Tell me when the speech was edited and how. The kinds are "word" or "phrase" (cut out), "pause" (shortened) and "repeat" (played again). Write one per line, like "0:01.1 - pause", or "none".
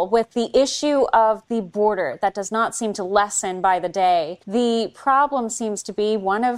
0:04.4 - pause

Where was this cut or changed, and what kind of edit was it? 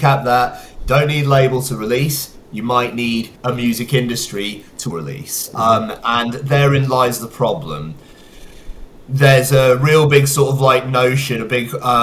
0:03.4 - pause
0:04.9 - phrase

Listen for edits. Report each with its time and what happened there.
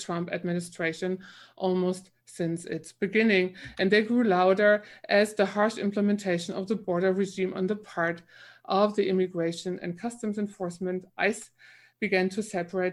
none

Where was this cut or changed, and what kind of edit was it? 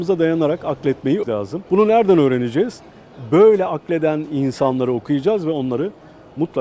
0:01.2 - word
0:01.7 - pause

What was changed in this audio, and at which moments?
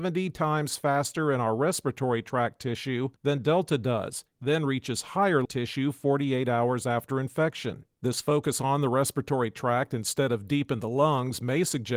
0:03.2 - pause
0:05.4 - phrase

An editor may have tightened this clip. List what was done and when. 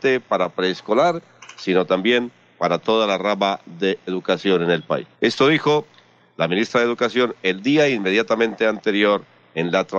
0:04.1 - word
0:05.1 - pause

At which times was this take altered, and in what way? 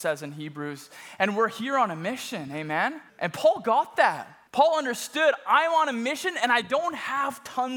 0:03.1 - pause
0:04.5 - pause

